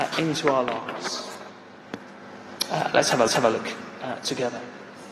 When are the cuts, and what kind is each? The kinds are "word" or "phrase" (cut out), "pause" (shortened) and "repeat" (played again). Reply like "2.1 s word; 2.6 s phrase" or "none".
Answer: 3.3 s repeat